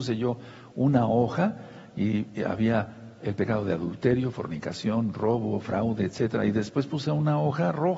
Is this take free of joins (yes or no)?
yes